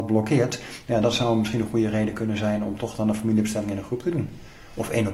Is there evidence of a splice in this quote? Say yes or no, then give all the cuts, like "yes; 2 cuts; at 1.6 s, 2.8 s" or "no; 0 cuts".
no; 0 cuts